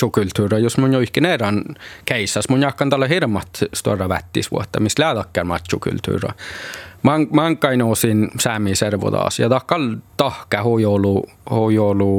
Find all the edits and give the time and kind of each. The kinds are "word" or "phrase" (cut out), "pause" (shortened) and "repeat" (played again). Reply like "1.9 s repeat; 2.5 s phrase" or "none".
10.1 s pause